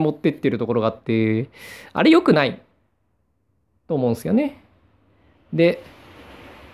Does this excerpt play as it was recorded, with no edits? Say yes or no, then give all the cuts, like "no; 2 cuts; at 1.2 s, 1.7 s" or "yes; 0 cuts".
yes; 0 cuts